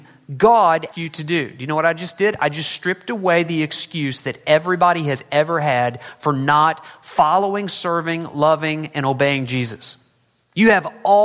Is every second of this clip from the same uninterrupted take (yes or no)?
no